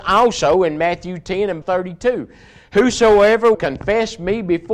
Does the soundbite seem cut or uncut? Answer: cut